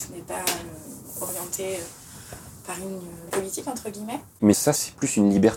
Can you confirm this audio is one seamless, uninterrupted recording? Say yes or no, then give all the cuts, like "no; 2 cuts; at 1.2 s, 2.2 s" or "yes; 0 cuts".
no; 2 cuts; at 3.3 s, 4.4 s